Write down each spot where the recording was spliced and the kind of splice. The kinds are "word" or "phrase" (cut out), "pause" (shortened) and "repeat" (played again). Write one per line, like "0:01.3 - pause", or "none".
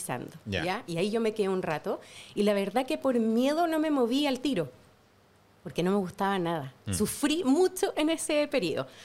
none